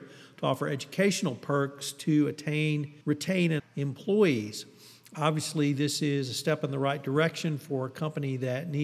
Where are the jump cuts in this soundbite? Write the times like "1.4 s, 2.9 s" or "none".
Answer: 3.0 s, 3.6 s